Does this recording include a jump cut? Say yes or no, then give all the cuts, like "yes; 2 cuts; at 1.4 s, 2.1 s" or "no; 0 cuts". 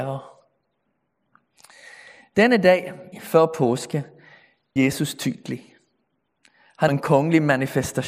yes; 3 cuts; at 3.1 s, 4.8 s, 6.9 s